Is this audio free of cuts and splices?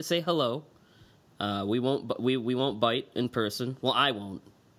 yes; 0 cuts

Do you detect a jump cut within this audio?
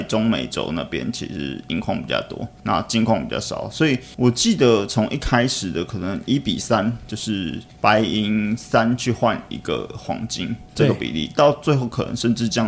no; 0 cuts

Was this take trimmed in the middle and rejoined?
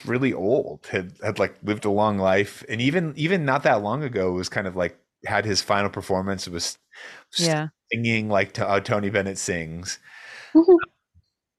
no; 0 cuts

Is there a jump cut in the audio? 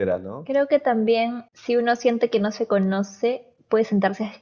yes; 1 cut; at 1.5 s

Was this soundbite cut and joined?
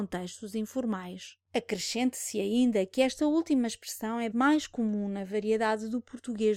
yes; 1 cut; at 4.3 s

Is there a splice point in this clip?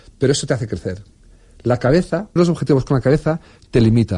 yes; 1 cut; at 2.4 s

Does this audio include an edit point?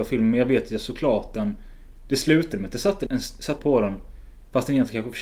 yes; 2 cuts; at 3.1 s, 3.6 s

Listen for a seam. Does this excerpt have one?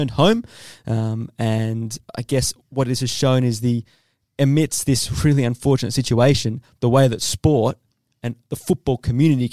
no; 0 cuts

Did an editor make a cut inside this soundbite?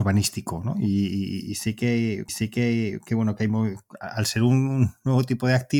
yes; 1 cut; at 2.3 s

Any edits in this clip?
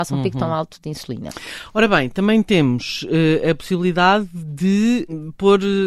no; 0 cuts

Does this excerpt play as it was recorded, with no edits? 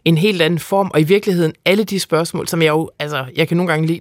yes; 0 cuts

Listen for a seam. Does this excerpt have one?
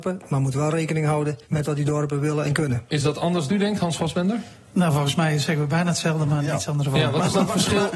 yes; 2 cuts; at 1.4 s, 3.5 s

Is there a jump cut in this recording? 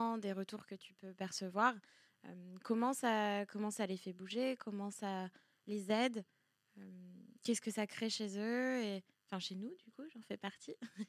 no; 0 cuts

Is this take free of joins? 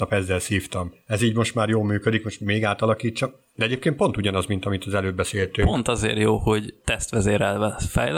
yes; 0 cuts

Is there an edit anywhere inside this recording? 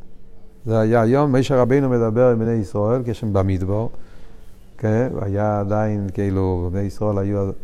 no; 0 cuts

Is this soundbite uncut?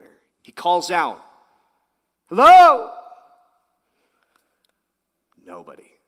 yes; 0 cuts

